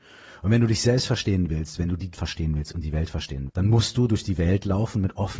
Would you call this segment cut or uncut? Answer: cut